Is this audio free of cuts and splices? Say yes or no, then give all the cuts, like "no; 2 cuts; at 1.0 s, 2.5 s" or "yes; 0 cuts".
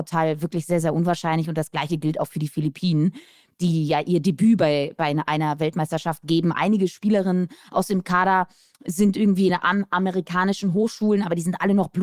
yes; 0 cuts